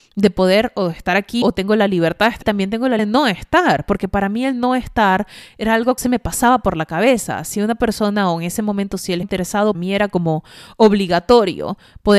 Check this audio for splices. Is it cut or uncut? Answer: cut